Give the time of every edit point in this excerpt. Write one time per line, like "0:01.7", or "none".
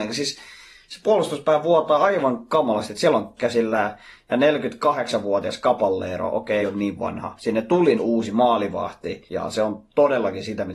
0:03.4
0:06.6
0:07.4
0:08.0
0:09.3